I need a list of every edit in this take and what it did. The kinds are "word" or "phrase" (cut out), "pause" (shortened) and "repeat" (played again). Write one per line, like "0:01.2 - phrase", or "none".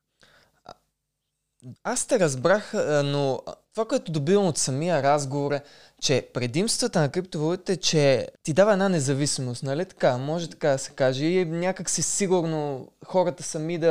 0:01.8 - pause
0:03.6 - pause
0:08.3 - pause

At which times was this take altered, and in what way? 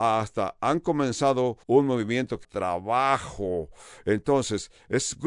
0:01.6 - pause
0:02.4 - phrase

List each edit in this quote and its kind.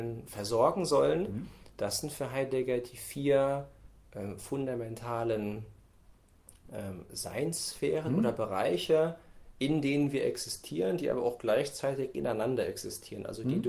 none

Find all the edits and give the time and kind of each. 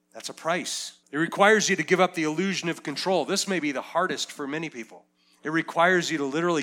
0:01.0 - pause
0:05.1 - pause

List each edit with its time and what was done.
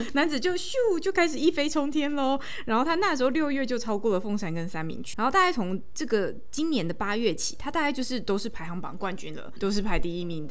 0:05.1 - word
0:09.6 - word

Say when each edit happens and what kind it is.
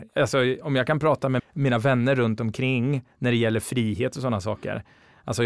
0:01.4 - word
0:03.1 - pause

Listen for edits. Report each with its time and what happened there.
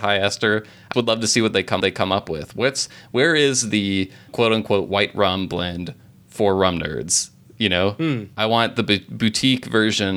0:00.9 - word
0:01.8 - repeat

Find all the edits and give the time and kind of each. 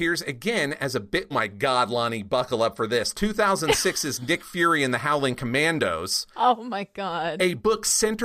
0:01.3 - phrase

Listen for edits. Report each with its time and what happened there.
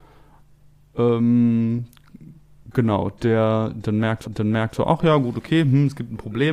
0:04.3 - repeat

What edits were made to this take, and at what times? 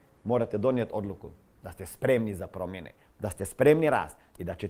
none

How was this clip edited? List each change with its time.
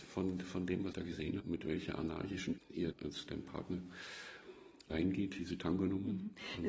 0:00.9 - word
0:01.4 - word
0:02.6 - word
0:02.9 - word
0:03.3 - word
0:04.9 - word
0:05.4 - word

